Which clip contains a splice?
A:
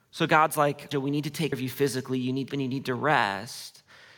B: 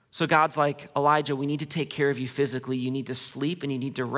A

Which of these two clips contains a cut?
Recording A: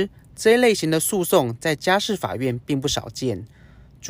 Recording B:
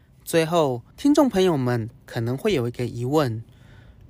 B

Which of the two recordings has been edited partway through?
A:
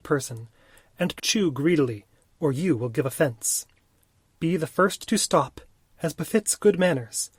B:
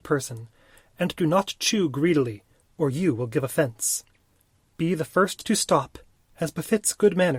A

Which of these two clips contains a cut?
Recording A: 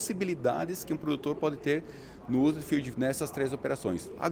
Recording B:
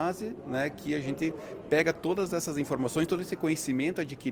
A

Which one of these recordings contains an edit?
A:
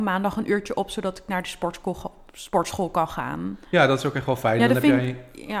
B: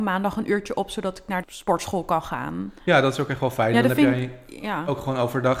B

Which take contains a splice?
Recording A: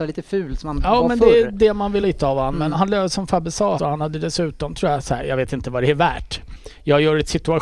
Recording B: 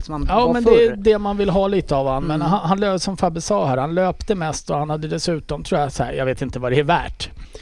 A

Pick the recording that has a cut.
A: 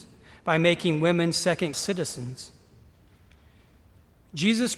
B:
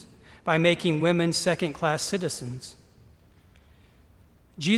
A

